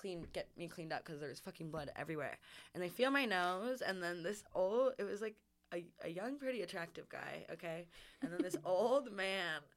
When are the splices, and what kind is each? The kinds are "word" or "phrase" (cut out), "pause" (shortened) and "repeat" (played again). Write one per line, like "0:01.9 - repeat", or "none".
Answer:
none

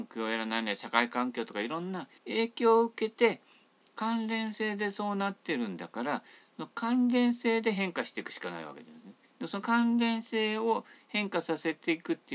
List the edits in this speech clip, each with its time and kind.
0:02.2 - pause
0:09.2 - pause

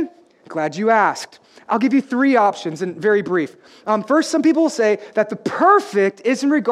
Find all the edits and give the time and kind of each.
none

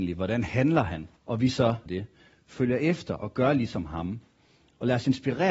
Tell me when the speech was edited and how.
0:01.2 - pause
0:01.9 - word

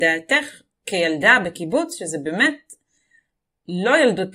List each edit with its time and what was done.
none

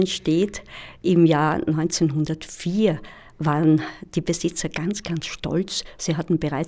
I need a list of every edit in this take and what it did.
none

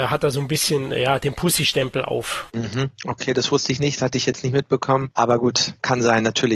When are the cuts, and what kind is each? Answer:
none

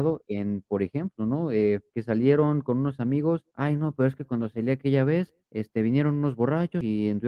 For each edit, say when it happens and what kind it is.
0:01.9 - pause
0:03.5 - pause
0:05.4 - pause

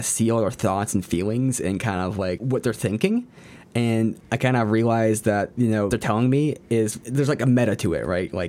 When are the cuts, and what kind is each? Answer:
0:02.4 - word
0:05.9 - word
0:07.0 - word

